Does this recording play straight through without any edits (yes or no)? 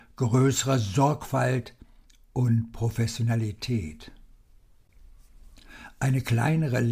yes